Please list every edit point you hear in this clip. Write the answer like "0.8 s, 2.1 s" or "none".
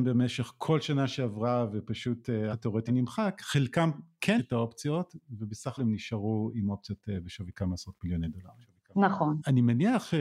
2.5 s, 2.9 s, 4.4 s, 5.8 s